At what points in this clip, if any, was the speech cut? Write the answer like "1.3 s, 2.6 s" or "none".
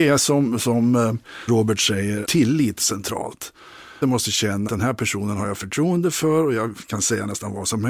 1.5 s, 2.2 s, 2.8 s, 4.0 s, 4.7 s, 5.5 s